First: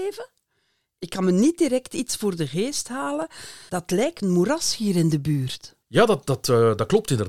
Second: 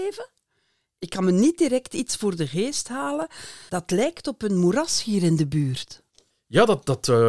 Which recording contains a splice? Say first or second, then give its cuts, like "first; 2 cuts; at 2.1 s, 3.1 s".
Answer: first; 2 cuts; at 4.2 s, 5.8 s